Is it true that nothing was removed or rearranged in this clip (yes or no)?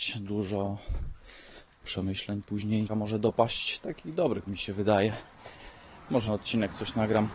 no